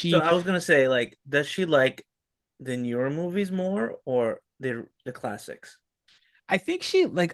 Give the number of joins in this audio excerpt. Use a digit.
0